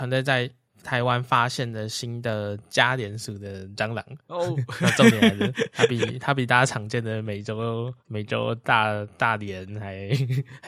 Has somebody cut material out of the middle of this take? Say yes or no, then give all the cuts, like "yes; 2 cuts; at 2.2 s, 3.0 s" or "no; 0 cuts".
yes; 1 cut; at 8.0 s